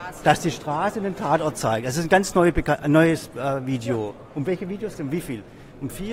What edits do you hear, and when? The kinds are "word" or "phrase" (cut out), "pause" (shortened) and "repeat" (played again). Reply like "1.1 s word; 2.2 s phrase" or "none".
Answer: 5.0 s word